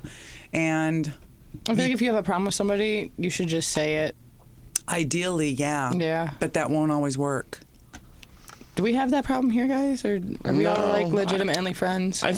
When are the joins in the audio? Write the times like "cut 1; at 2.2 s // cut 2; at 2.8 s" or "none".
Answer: none